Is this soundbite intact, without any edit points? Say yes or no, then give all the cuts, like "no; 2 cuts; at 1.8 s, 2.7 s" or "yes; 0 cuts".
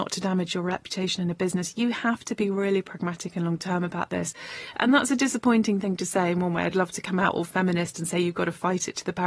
yes; 0 cuts